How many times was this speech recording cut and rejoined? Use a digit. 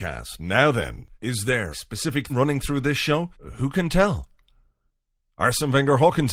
4